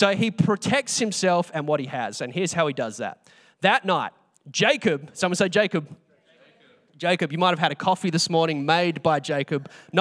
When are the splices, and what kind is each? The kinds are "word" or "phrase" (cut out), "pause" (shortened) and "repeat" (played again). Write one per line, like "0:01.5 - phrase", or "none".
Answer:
none